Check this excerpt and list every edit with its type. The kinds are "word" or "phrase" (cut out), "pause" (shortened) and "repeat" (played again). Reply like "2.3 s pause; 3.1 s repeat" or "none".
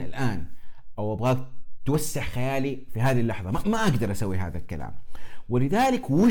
none